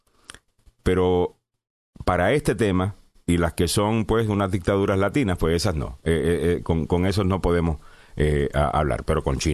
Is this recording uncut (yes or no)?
yes